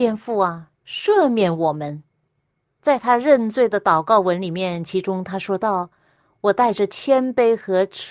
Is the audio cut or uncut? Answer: uncut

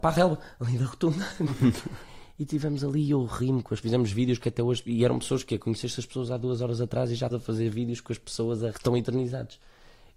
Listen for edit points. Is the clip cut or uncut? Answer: cut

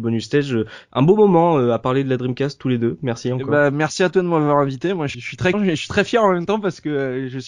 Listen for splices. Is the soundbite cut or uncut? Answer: cut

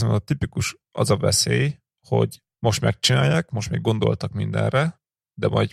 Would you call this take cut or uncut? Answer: uncut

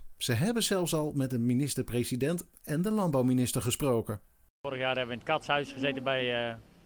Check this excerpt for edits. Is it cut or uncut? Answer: uncut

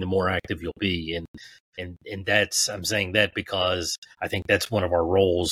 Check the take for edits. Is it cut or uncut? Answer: cut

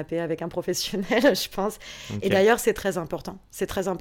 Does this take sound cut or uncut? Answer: uncut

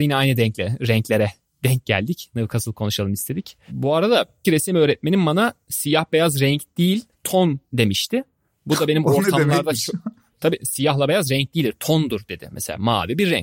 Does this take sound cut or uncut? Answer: cut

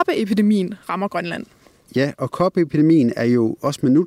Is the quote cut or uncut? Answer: uncut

